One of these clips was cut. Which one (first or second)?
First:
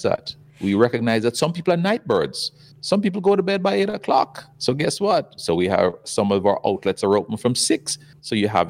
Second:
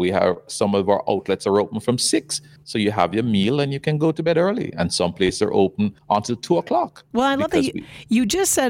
second